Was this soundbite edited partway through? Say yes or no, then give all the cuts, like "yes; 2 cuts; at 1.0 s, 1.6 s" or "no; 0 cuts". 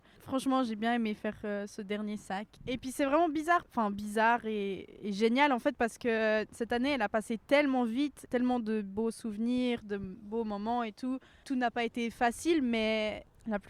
no; 0 cuts